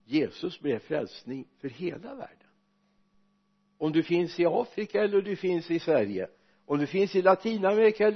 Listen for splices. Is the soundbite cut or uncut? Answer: uncut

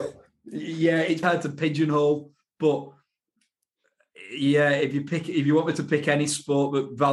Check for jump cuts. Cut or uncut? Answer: cut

